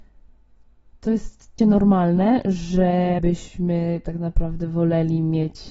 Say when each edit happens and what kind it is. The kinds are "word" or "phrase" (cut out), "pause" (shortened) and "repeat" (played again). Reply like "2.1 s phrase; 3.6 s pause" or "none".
1.6 s word; 3.2 s word